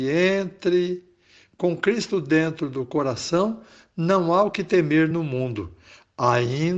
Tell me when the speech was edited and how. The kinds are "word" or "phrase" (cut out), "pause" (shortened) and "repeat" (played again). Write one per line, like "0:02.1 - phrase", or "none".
none